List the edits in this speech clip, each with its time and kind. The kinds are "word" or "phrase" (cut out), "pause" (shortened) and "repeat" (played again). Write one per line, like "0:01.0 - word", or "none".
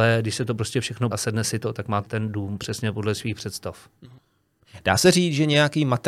0:01.1 - word
0:02.1 - word